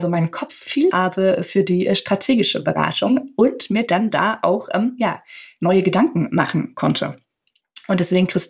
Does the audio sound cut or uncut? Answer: cut